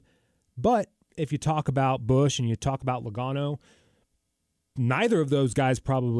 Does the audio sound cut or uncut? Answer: uncut